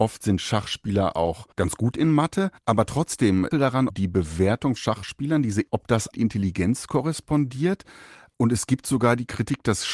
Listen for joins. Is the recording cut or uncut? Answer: cut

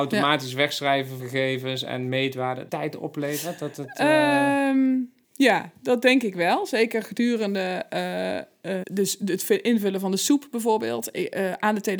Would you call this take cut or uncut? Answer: cut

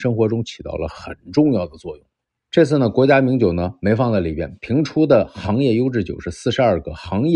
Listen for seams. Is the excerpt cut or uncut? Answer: cut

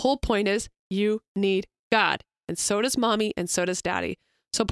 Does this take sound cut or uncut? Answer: uncut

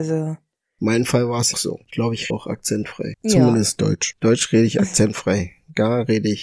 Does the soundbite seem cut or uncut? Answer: cut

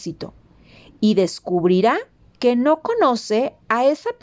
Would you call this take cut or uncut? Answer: uncut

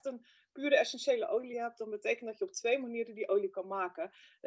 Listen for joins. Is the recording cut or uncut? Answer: uncut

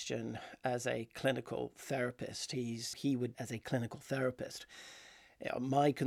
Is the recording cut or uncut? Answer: cut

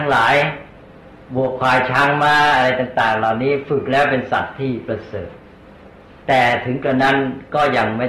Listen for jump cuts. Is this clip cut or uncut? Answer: uncut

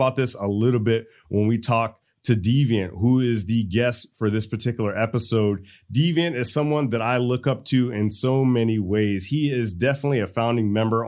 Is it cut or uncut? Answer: uncut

